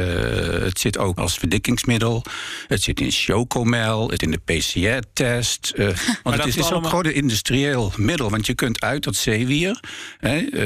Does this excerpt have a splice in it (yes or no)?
yes